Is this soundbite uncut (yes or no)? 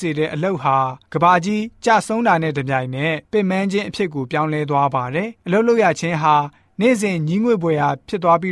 no